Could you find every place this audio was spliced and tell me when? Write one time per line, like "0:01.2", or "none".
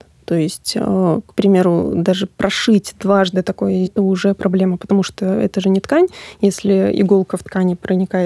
0:03.9